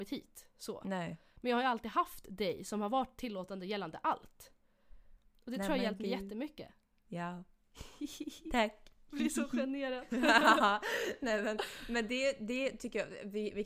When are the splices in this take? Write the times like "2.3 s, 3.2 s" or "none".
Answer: none

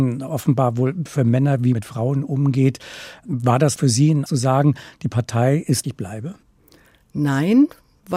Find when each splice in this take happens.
1.7 s, 3.8 s, 4.3 s, 5.8 s

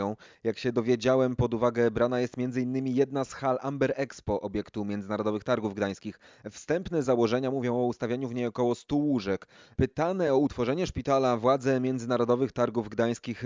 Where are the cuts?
none

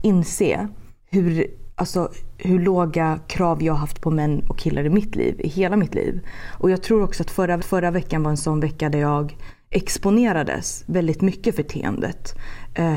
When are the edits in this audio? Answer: 1.0 s, 7.6 s, 11.6 s

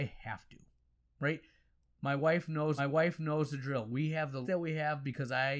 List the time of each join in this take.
2.8 s, 4.4 s

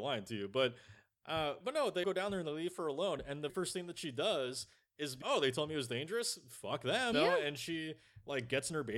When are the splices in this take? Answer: 1.6 s, 2.0 s, 3.5 s, 5.2 s, 7.1 s

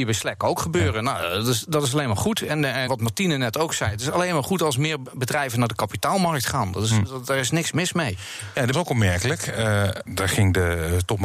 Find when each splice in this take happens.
2.9 s, 8.7 s, 10.1 s

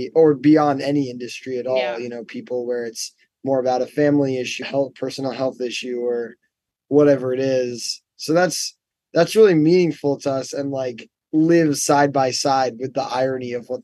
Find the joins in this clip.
4.6 s

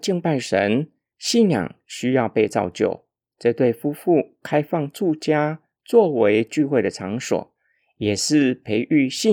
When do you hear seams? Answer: none

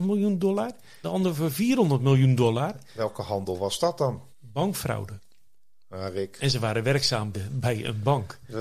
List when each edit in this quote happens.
1.0 s, 4.3 s, 7.3 s

